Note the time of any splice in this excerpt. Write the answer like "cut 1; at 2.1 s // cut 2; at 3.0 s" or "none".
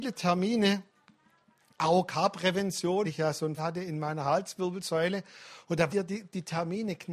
cut 1; at 3.0 s // cut 2; at 3.6 s // cut 3; at 5.9 s